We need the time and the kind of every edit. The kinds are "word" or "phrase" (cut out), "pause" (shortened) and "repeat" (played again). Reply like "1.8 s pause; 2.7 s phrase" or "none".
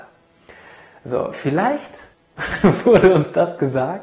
2.1 s pause